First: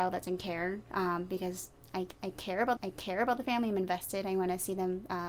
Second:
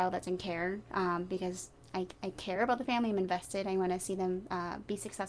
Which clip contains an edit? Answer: first; 1 cut; at 2.8 s

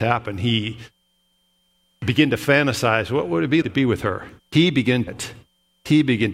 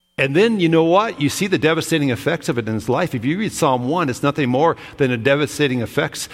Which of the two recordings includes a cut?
first; 3 cuts; at 3.6 s, 4.4 s, 5.1 s

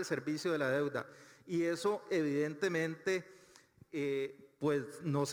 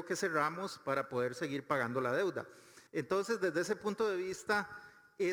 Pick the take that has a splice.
second; 1 cut; at 2.9 s

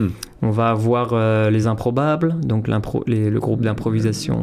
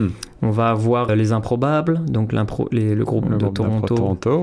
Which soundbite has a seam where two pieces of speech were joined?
second; 2 cuts; at 1.1 s, 3.2 s

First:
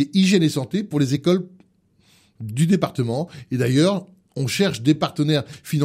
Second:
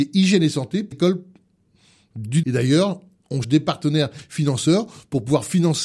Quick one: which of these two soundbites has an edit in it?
second; 3 cuts; at 0.9 s, 2.4 s, 3.4 s

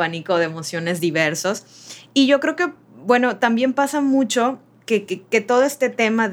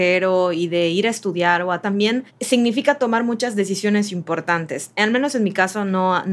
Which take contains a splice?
second; 2 cuts; at 1.8 s, 2.3 s

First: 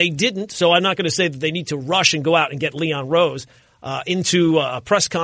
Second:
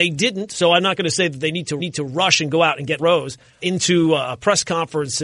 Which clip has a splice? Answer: second; 3 cuts; at 1.8 s, 3.0 s, 3.6 s

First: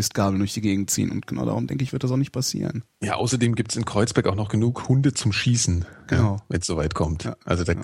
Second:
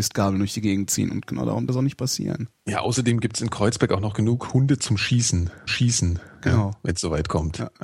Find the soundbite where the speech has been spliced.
second; 2 cuts; at 1.7 s, 5.7 s

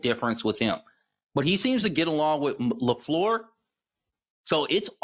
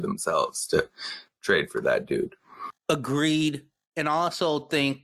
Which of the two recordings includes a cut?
second; 1 cut; at 2.8 s

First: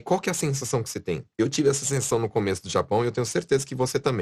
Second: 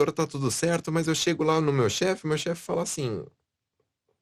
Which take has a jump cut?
first; 1 cut; at 1.3 s

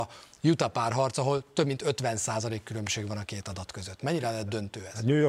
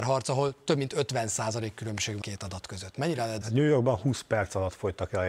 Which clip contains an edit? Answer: second; 2 cuts; at 2.2 s, 3.4 s

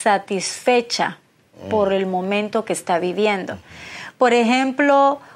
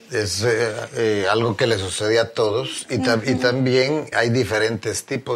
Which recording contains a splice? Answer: second; 1 cut; at 4.1 s

